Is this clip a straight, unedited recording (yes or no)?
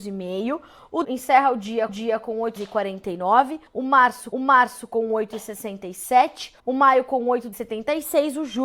no